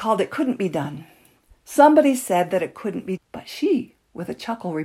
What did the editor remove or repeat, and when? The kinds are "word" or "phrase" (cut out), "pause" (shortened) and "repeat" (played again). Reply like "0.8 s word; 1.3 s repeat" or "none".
3.2 s word